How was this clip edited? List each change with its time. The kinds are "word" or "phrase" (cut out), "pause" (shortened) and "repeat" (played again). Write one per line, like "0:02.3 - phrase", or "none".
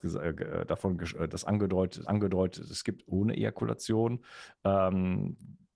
0:02.0 - repeat
0:03.1 - phrase